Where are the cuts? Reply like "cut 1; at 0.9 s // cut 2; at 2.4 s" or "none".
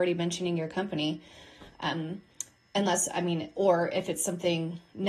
none